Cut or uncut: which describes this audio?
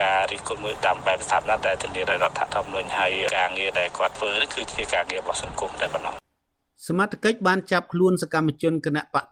uncut